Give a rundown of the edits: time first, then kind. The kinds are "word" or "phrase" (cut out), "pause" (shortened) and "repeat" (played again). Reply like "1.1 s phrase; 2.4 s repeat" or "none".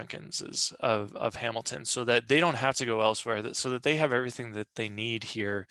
none

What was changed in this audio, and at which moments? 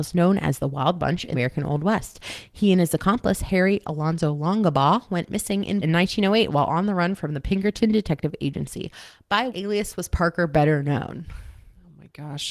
1.3 s word; 5.8 s word; 9.5 s word

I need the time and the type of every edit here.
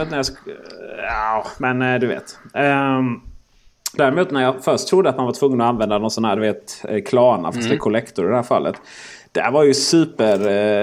none

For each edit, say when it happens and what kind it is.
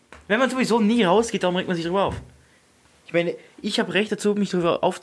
none

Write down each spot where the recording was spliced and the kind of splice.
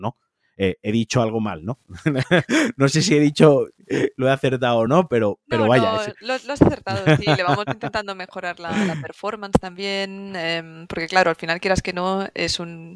none

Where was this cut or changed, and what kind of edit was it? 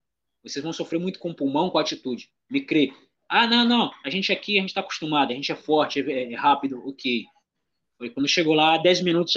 none

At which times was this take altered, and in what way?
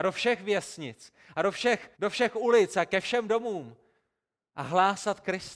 2.0 s pause

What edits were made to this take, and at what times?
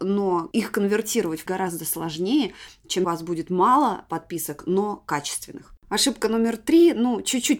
1.5 s phrase; 3.0 s phrase

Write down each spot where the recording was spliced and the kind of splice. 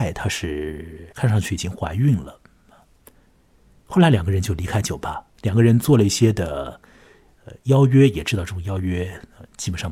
1.1 s pause; 5.3 s pause

